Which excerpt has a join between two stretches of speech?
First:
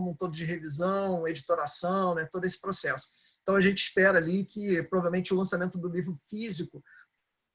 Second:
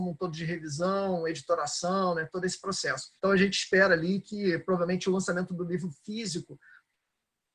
second; 1 cut; at 3.2 s

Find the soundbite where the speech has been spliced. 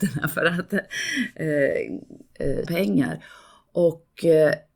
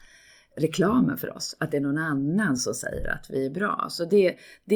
first; 1 cut; at 2.7 s

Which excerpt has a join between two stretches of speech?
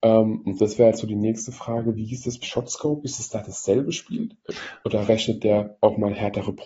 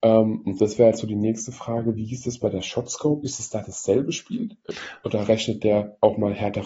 first; 1 cut; at 2.4 s

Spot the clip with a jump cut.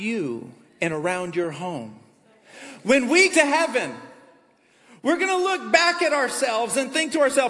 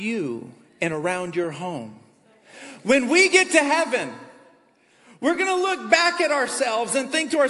first; 1 cut; at 3.3 s

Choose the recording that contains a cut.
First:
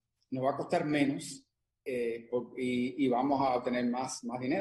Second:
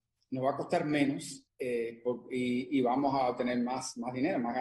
second; 1 cut; at 1.5 s

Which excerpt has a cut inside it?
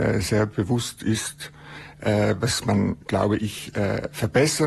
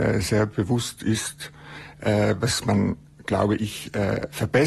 first; 1 cut; at 3.0 s

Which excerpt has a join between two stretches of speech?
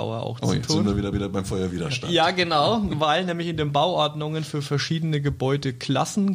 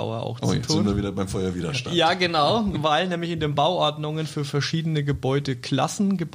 first; 1 cut; at 1.1 s

